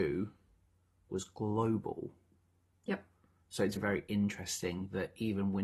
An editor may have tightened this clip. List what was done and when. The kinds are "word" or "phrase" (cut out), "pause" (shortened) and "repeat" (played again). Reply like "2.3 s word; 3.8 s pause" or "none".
3.8 s word